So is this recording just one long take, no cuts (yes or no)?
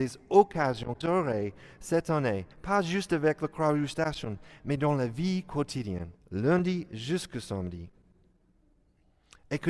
no